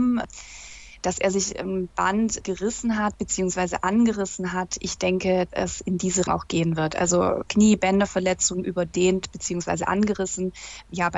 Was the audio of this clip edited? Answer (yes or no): yes